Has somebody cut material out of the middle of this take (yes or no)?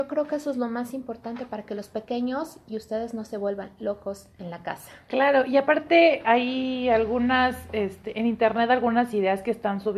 yes